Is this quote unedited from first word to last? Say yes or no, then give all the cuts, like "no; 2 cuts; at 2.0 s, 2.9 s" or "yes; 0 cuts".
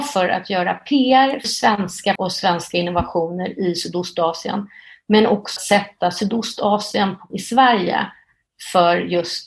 no; 4 cuts; at 1.4 s, 2.2 s, 5.6 s, 7.3 s